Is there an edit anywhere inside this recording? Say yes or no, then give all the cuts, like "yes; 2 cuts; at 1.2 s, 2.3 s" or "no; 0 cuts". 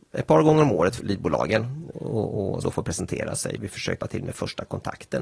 yes; 5 cuts; at 1.0 s, 1.9 s, 2.6 s, 3.6 s, 4.0 s